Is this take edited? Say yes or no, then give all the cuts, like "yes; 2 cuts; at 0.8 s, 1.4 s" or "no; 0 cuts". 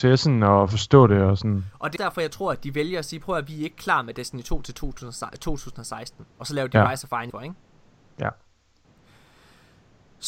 yes; 3 cuts; at 2.0 s, 6.3 s, 7.3 s